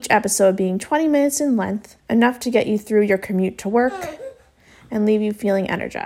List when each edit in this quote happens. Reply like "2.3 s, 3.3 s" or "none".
2.0 s